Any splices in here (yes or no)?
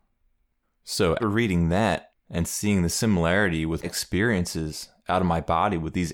yes